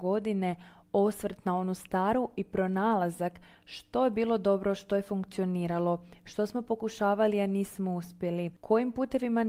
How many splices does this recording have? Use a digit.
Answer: 0